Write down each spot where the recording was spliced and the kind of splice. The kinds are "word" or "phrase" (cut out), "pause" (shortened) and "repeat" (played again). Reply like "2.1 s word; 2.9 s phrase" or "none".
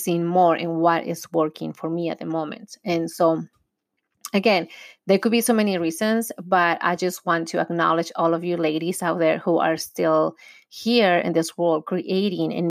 none